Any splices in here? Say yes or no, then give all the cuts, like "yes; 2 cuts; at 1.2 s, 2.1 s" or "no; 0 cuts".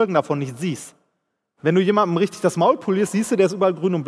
no; 0 cuts